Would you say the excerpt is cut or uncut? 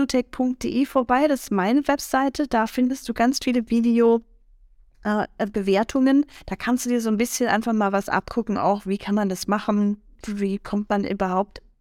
uncut